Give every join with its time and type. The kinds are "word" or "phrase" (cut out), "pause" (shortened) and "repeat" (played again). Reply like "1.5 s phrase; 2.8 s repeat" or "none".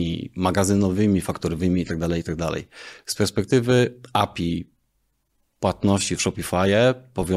none

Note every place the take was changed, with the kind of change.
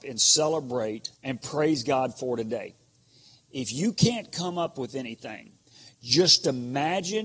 1.1 s pause

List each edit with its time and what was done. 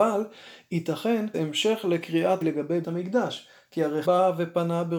1.3 s word; 2.4 s word; 2.8 s word; 4.0 s word

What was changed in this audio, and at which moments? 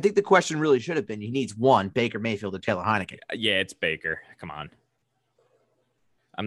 none

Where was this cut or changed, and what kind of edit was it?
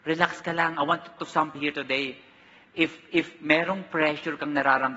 1.2 s word; 1.5 s word

